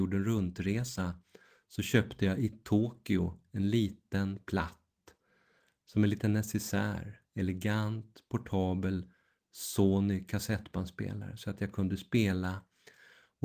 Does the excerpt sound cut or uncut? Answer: uncut